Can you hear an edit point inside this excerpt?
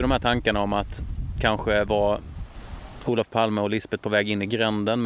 no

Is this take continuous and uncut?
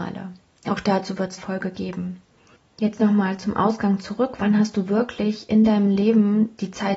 no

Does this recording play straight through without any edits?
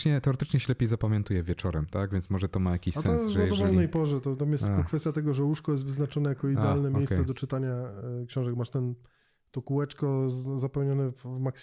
yes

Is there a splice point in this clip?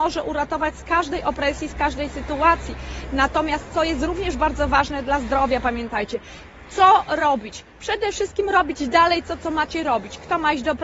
no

